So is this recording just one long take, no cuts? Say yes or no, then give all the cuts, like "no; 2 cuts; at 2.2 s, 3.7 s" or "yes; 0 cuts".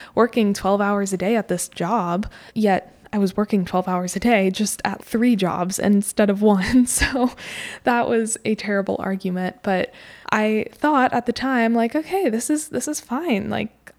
no; 3 cuts; at 2.5 s, 5.0 s, 10.2 s